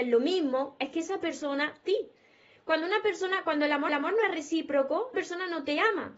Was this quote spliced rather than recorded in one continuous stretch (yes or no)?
yes